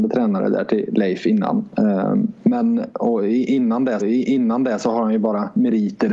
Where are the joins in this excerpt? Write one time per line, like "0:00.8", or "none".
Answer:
0:04.0